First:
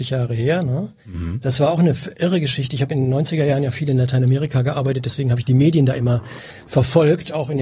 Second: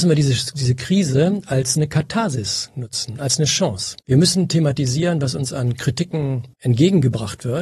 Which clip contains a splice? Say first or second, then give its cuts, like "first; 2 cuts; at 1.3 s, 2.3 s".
second; 2 cuts; at 4.0 s, 6.5 s